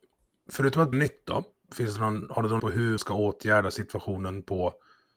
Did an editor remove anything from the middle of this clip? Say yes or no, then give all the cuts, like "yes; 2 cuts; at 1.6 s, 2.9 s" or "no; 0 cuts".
yes; 4 cuts; at 0.9 s, 1.7 s, 2.6 s, 3.0 s